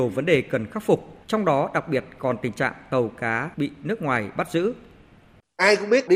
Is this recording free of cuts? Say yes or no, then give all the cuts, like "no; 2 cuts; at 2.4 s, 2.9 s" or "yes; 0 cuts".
no; 2 cuts; at 1.2 s, 3.5 s